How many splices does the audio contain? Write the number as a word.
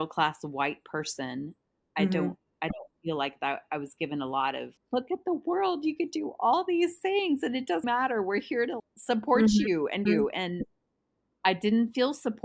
four